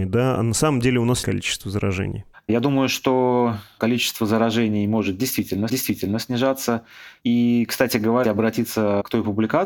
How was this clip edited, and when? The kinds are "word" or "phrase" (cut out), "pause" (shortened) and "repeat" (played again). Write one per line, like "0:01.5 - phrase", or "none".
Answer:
0:01.2 - word
0:02.3 - pause
0:05.7 - repeat
0:08.2 - word